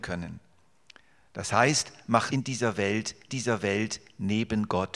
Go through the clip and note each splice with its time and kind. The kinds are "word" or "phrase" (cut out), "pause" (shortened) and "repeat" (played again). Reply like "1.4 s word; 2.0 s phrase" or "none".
2.3 s word; 3.3 s repeat

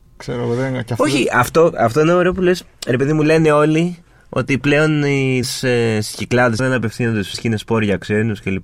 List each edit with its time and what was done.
5.4 s word; 6.6 s word; 7.3 s word

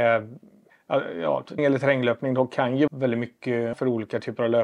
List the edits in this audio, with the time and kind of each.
1.6 s word; 2.9 s word; 3.7 s word

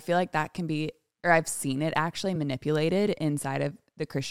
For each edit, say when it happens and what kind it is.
none

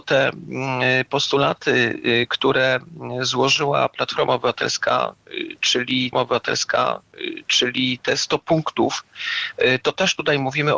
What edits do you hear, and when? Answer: 6.1 s repeat

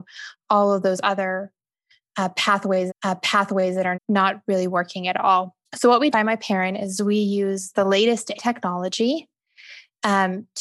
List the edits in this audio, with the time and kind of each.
2.9 s repeat; 3.9 s word; 5.6 s pause; 6.1 s phrase; 8.3 s word

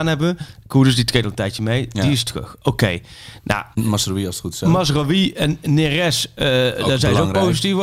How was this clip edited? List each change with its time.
3.7 s pause

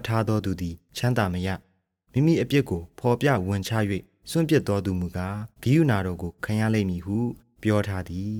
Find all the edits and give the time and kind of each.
5.5 s pause

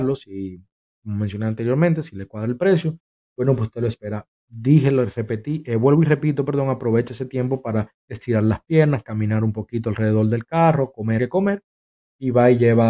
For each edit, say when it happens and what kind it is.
8.0 s pause; 11.2 s phrase

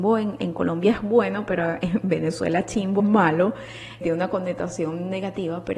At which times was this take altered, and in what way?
3.0 s word; 4.0 s word

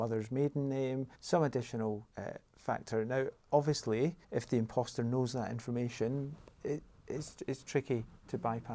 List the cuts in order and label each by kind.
1.1 s pause; 2.1 s pause; 4.2 s pause

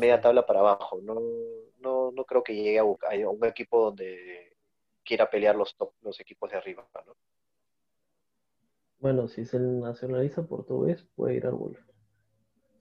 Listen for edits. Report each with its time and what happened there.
none

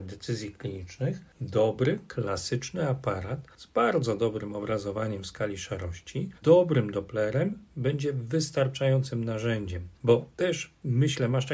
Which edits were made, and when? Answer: 6.4 s word

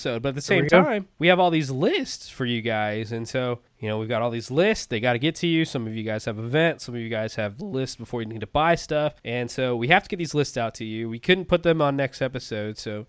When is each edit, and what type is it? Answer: 1.1 s pause; 3.7 s pause; 9.2 s pause

